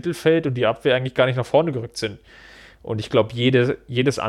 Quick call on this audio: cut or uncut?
uncut